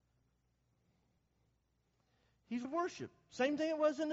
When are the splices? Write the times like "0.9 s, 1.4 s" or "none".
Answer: 2.6 s